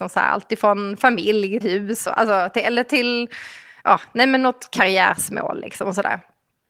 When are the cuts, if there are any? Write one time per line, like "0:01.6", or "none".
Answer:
0:01.6